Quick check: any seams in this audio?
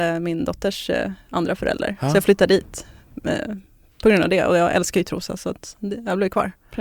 no; 0 cuts

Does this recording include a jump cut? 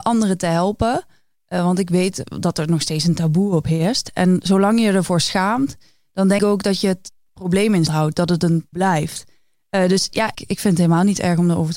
yes; 4 cuts; at 6.4 s, 7.9 s, 8.7 s, 10.3 s

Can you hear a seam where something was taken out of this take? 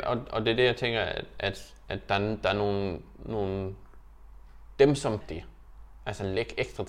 yes; 1 cut; at 5.2 s

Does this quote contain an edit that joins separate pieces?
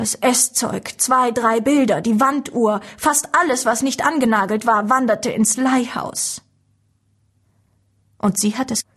no; 0 cuts

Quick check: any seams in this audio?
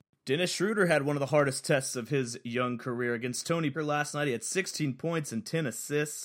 yes; 1 cut; at 3.7 s

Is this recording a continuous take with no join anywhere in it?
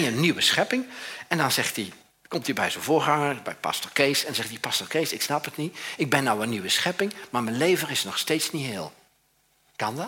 yes; 0 cuts

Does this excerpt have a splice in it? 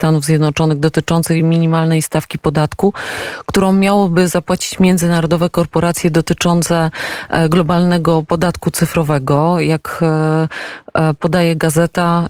no; 0 cuts

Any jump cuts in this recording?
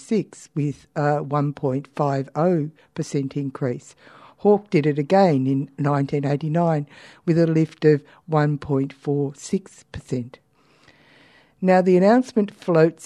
no; 0 cuts

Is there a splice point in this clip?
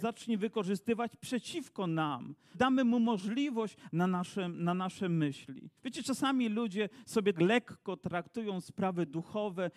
yes; 4 cuts; at 2.5 s, 3.9 s, 5.8 s, 7.3 s

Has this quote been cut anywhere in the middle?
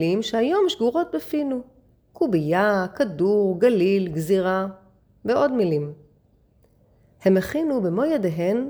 no; 0 cuts

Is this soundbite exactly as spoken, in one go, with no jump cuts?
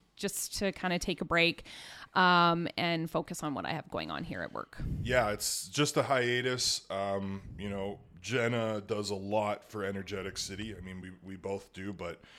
yes; 0 cuts

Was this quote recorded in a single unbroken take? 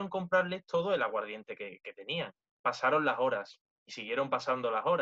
yes; 0 cuts

